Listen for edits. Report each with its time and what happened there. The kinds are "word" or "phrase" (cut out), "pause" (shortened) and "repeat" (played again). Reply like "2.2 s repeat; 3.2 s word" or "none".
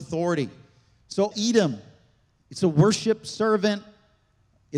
1.3 s word